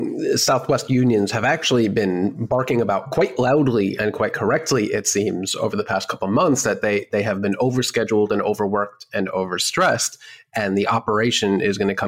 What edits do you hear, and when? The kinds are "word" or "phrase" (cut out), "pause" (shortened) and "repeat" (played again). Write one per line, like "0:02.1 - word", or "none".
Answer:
none

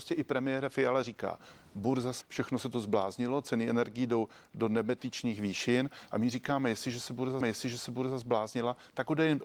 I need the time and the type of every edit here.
0:02.2 - word
0:07.4 - repeat

